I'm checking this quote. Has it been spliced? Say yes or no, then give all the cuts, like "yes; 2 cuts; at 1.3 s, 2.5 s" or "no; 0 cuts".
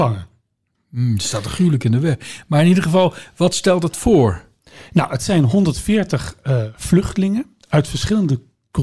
no; 0 cuts